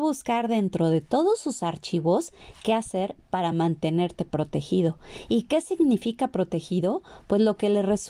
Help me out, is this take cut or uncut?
uncut